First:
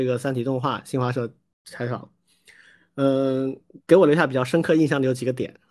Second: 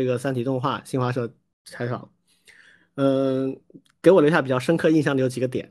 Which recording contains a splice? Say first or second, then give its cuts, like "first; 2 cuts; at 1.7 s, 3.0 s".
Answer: first; 1 cut; at 3.8 s